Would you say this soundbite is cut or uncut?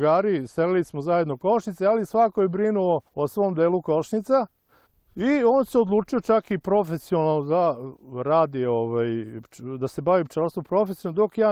cut